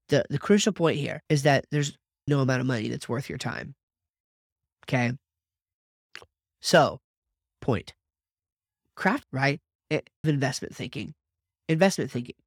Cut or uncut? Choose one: cut